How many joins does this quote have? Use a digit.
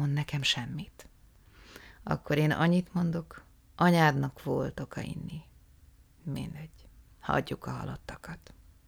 0